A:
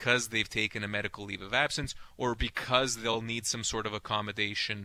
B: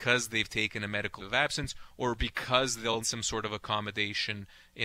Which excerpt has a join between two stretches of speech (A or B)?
B